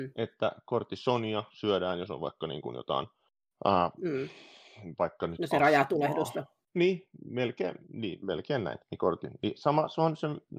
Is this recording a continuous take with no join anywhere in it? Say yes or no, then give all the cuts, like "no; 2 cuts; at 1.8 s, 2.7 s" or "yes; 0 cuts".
no; 4 cuts; at 3.4 s, 6.6 s, 7.8 s, 8.8 s